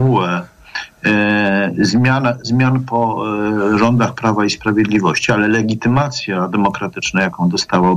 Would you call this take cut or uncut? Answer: uncut